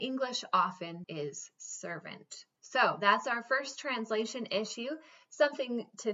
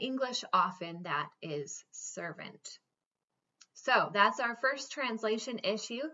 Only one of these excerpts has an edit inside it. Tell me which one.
first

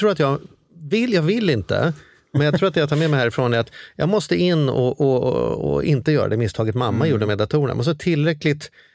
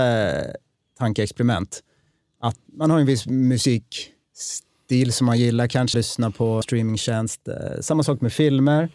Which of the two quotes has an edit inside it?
second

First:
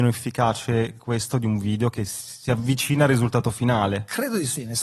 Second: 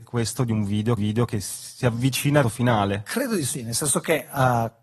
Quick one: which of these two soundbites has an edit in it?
second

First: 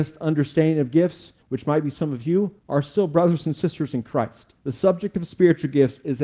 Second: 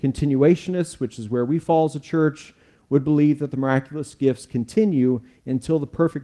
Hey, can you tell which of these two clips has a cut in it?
first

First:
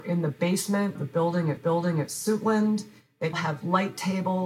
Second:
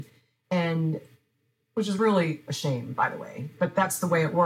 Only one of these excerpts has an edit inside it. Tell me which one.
first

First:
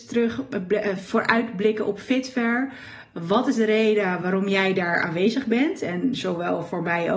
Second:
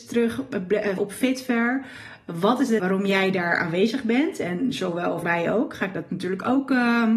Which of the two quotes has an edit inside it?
second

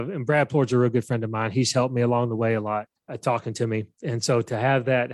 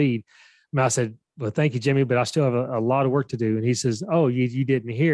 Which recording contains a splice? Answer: first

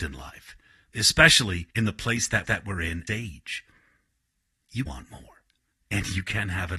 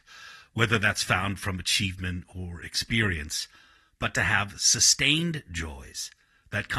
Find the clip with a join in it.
first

